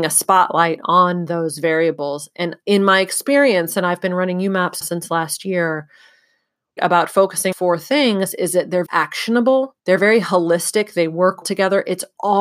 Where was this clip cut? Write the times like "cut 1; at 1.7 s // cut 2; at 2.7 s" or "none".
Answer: cut 1; at 2.6 s // cut 2; at 4.8 s // cut 3; at 6.8 s // cut 4; at 7.5 s // cut 5; at 8.9 s // cut 6; at 9.8 s // cut 7; at 11.4 s